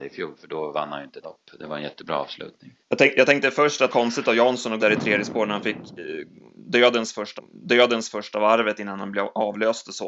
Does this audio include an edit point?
yes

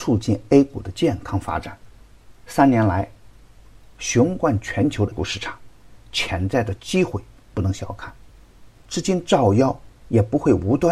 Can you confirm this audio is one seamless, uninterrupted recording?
no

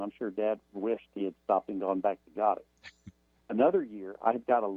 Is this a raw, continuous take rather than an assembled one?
yes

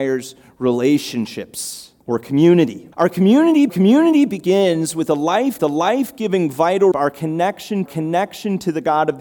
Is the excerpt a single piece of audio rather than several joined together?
no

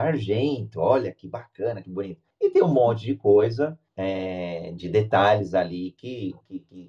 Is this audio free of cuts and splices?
yes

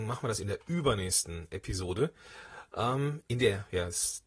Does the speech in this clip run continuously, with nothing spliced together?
yes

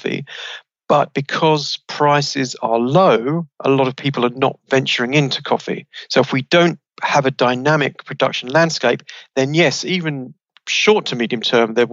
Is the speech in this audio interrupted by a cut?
no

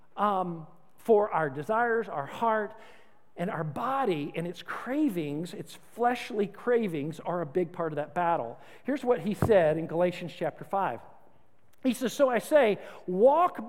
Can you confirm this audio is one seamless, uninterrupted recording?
yes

